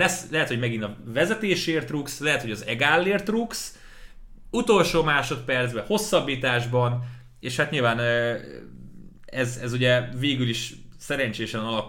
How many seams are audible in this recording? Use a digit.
0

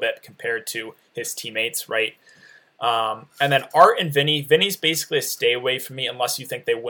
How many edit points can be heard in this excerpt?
0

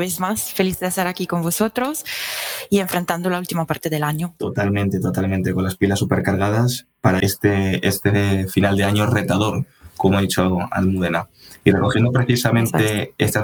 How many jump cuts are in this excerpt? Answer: 1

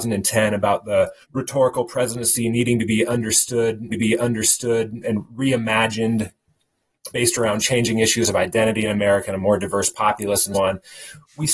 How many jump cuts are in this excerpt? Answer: 4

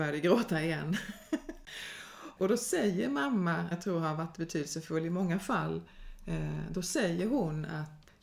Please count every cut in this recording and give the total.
2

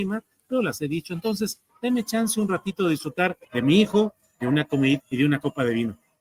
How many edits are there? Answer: 2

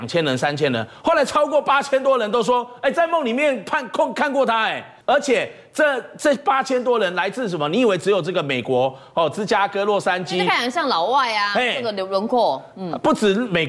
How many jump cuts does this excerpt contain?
1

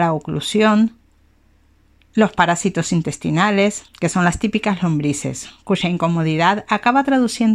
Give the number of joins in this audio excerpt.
1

